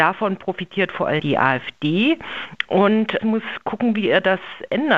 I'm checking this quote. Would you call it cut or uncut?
cut